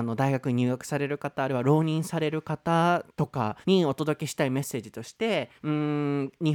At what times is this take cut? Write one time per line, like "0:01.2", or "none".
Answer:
0:03.6
0:05.6